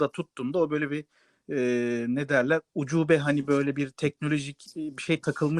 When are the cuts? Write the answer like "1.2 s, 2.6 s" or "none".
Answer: none

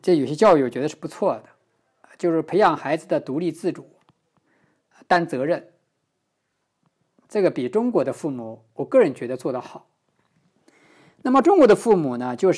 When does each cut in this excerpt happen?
none

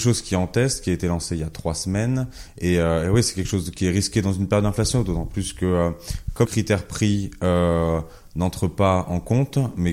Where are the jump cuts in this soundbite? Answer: 6.4 s

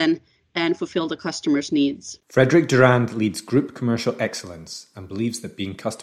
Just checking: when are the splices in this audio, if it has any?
2.2 s

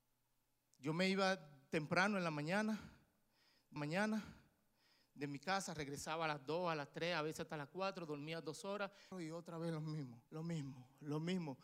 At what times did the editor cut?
3.8 s, 9.1 s, 10.3 s

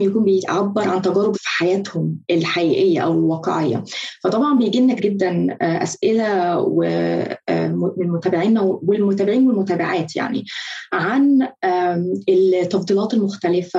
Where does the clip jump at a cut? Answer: 1.3 s, 2.2 s, 5.0 s

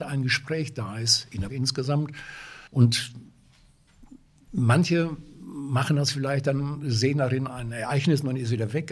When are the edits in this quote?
1.5 s, 2.7 s, 7.5 s

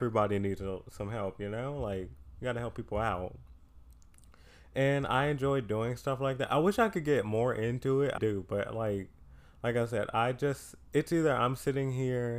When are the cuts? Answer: 8.2 s

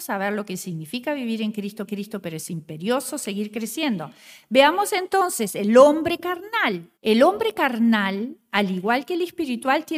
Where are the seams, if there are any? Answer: 1.9 s, 7.0 s

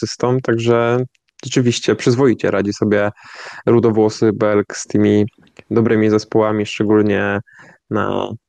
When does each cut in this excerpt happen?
none

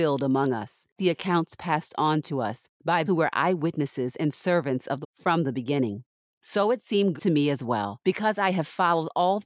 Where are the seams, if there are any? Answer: 1.0 s, 3.1 s, 5.0 s, 7.2 s

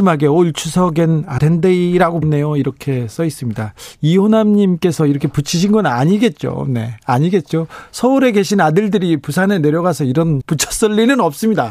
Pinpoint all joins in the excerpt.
1.4 s, 2.2 s, 10.4 s

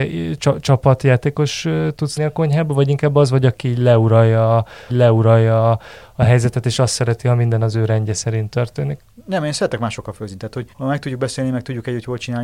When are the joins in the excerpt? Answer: 2.2 s, 4.9 s, 10.7 s

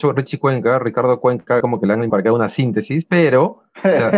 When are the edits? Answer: 1.6 s, 2.1 s

